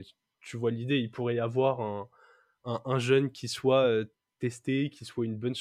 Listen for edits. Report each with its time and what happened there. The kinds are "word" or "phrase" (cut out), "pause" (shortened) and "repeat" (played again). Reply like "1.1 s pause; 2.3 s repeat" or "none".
none